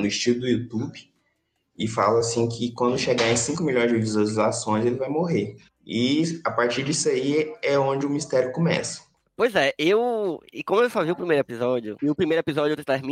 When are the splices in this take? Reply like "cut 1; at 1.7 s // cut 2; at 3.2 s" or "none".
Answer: none